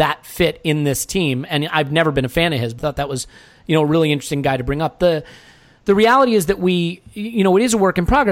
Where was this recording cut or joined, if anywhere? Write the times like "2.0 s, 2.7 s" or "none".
2.8 s